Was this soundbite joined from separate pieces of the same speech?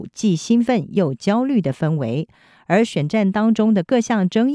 no; 0 cuts

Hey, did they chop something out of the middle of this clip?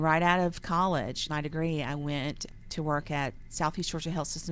yes; 1 cut; at 1.3 s

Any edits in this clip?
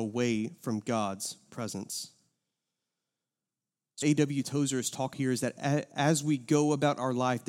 yes; 2 cuts; at 4.0 s, 5.1 s

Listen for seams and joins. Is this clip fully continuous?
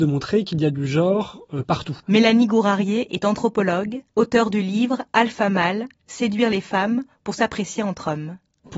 no; 2 cuts; at 2.0 s, 4.1 s

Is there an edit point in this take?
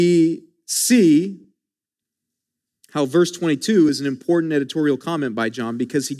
no; 0 cuts

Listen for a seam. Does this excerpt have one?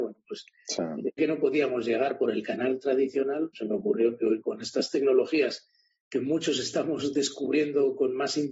yes; 2 cuts; at 1.2 s, 3.5 s

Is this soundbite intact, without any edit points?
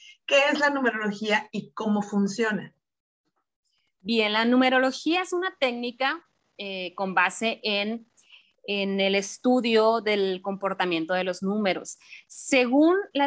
yes; 0 cuts

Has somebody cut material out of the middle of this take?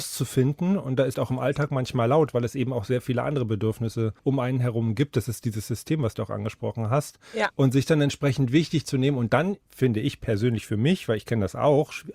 yes; 3 cuts; at 1.1 s, 4.2 s, 6.1 s

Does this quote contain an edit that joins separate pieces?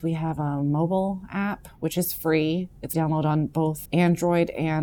yes; 2 cuts; at 2.9 s, 3.9 s

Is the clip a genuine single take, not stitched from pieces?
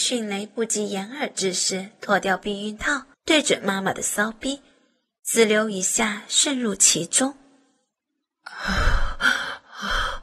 no; 1 cut; at 3.1 s

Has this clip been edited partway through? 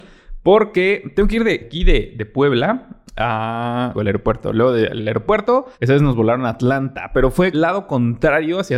yes; 5 cuts; at 1.6 s, 3.9 s, 5.0 s, 5.7 s, 7.5 s

